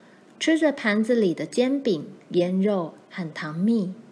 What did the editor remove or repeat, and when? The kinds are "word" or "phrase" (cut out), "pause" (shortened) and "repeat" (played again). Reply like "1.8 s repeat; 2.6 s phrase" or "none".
2.2 s pause